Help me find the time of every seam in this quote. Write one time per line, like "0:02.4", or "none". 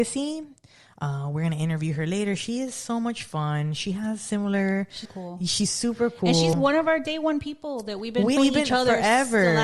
0:05.0
0:06.5
0:08.4